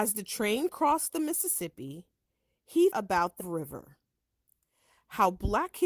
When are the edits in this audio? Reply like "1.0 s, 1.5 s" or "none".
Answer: 2.9 s, 3.4 s